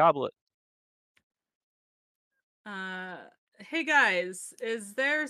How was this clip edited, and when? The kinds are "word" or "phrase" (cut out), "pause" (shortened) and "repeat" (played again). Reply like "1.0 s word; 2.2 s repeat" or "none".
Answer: none